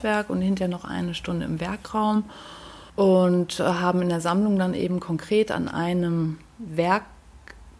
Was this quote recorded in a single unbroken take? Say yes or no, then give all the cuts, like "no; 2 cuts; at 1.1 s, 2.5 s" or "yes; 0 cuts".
no; 1 cut; at 2.9 s